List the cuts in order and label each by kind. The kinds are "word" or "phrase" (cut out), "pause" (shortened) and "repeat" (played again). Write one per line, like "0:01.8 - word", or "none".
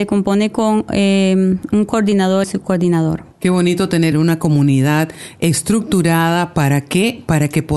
0:02.4 - phrase
0:03.3 - pause
0:04.1 - phrase